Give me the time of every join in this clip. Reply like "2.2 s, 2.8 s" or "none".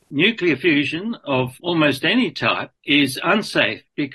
1.6 s, 2.8 s

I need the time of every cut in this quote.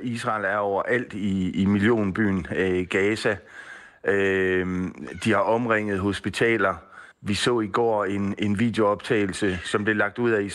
7.1 s

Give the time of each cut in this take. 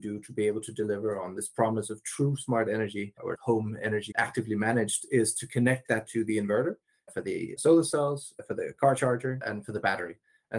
6.0 s

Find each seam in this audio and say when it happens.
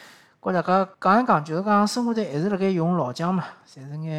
0.9 s

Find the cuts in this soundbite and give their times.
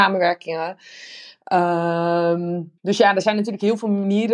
2.8 s

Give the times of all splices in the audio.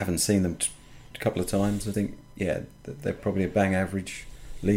1.9 s

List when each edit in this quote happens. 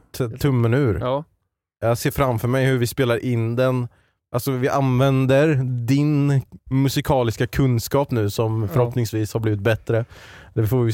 6.6 s

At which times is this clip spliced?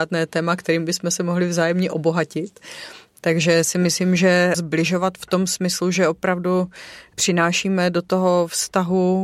none

